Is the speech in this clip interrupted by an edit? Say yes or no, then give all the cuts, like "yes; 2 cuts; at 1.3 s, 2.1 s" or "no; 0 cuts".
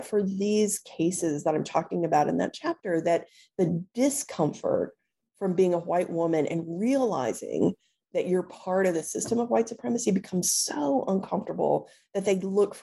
no; 0 cuts